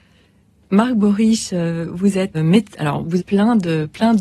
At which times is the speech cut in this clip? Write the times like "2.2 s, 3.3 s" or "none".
2.3 s, 3.2 s